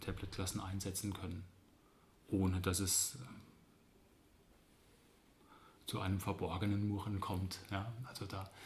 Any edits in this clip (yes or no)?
no